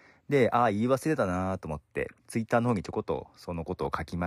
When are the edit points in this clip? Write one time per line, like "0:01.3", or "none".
0:02.2